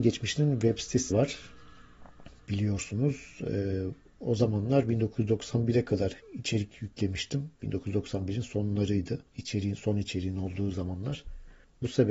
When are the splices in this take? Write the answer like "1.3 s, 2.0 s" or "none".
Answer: 1.1 s, 6.2 s